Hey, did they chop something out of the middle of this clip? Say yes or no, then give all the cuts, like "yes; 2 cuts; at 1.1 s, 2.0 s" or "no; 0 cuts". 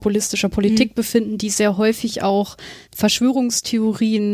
yes; 1 cut; at 2.9 s